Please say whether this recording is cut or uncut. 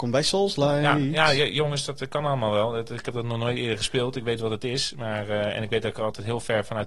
uncut